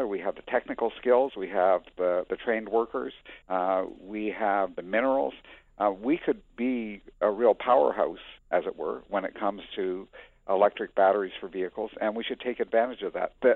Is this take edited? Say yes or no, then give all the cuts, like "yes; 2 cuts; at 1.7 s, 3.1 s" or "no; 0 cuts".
yes; 2 cuts; at 3.4 s, 8.4 s